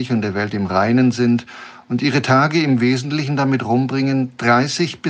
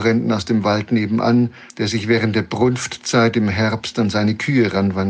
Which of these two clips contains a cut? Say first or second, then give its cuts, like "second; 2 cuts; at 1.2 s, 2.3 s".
second; 1 cut; at 1.7 s